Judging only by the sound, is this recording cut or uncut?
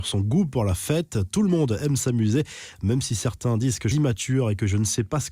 cut